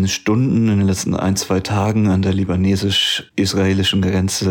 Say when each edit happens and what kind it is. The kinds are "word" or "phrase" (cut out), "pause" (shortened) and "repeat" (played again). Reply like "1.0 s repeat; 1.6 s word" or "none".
none